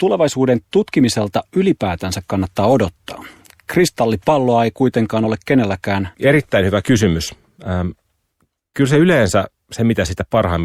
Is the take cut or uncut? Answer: uncut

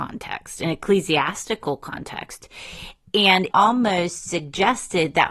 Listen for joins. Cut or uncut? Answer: cut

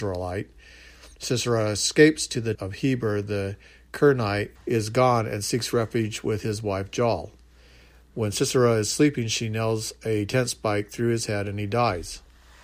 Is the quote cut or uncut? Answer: cut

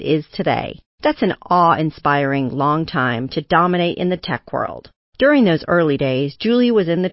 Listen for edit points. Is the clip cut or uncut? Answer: uncut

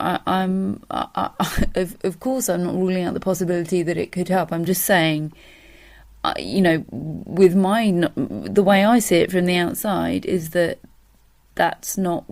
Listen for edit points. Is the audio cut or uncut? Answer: uncut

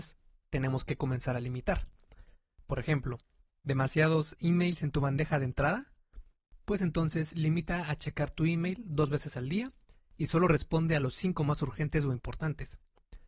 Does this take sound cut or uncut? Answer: uncut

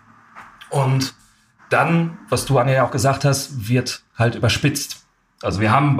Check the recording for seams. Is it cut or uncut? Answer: uncut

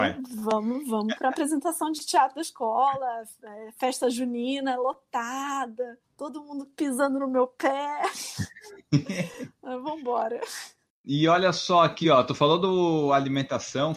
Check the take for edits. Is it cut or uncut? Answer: uncut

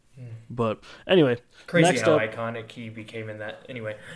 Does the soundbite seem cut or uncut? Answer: uncut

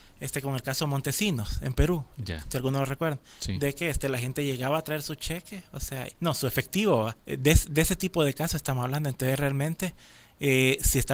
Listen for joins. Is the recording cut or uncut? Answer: cut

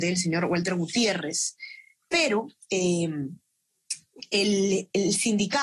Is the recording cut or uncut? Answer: uncut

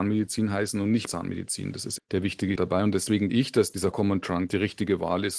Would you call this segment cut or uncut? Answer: cut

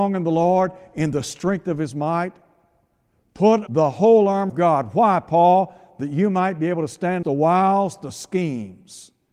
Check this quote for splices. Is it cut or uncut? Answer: cut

